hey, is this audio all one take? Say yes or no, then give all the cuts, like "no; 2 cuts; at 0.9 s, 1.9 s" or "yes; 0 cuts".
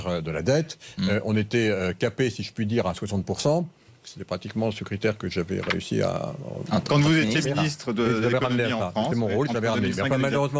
yes; 0 cuts